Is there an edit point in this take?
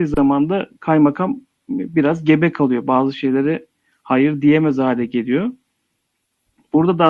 no; 0 cuts

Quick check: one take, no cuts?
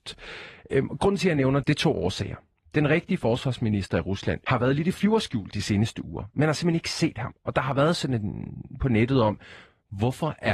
no; 3 cuts; at 1.6 s, 4.4 s, 8.8 s

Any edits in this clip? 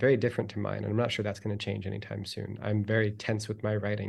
no; 0 cuts

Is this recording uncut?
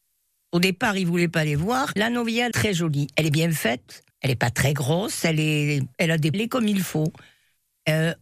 no; 5 cuts; at 2.0 s, 2.5 s, 4.1 s, 5.9 s, 6.3 s

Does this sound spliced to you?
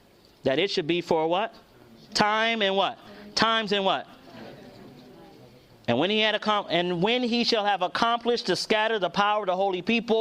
no; 0 cuts

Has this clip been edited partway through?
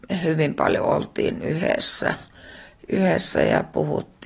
no; 0 cuts

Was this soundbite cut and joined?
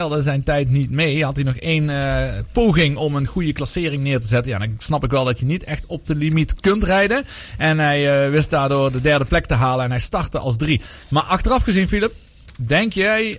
no; 0 cuts

